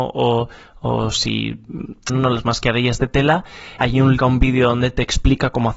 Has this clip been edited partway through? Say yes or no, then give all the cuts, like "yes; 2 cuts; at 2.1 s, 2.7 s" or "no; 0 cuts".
yes; 3 cuts; at 2.1 s, 3.8 s, 4.2 s